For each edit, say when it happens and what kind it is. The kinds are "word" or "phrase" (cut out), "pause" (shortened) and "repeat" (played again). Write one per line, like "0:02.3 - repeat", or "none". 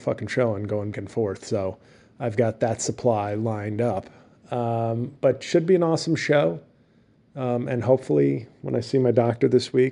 0:00.9 - word

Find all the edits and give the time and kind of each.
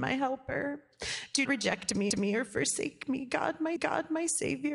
0:01.4 - word
0:02.1 - repeat
0:03.8 - repeat

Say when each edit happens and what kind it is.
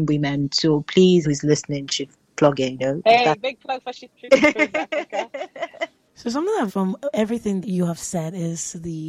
0:01.2 - word
0:02.8 - word
0:06.7 - word
0:07.6 - word

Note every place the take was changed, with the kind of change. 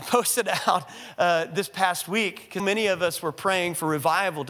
0:02.6 - word

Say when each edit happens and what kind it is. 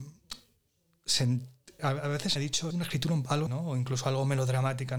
0:01.8 - word
0:02.4 - word
0:02.7 - word
0:03.5 - word

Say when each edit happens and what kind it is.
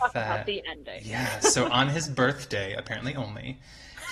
none

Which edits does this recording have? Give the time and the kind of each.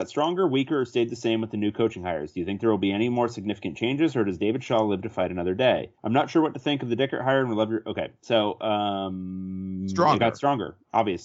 0:06.0 - pause

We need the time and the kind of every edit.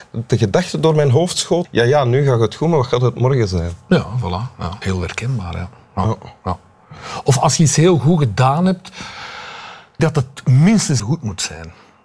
0:01.6 - word
0:04.8 - word
0:10.0 - word
0:11.0 - word

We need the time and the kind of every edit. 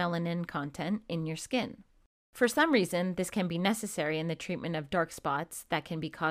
none

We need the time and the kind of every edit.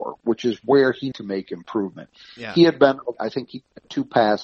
0:01.1 - word
0:03.1 - word

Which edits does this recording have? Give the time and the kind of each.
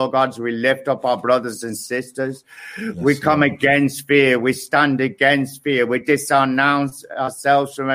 none

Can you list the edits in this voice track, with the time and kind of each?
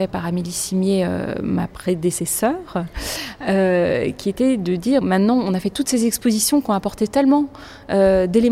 0:05.0 - word

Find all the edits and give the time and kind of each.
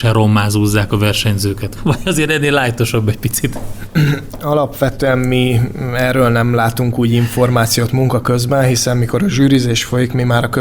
0:01.8 - word

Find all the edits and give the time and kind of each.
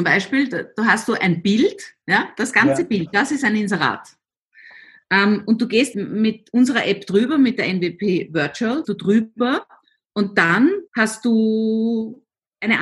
0:05.9 - word
0:08.8 - word
0:10.9 - pause

